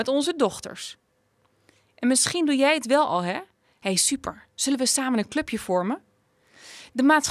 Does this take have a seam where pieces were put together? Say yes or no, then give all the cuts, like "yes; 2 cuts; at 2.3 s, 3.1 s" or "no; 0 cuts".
no; 0 cuts